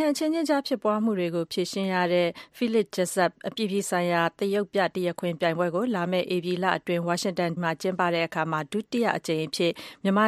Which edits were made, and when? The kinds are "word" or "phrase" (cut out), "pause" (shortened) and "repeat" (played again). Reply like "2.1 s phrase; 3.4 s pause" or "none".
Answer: 7.6 s word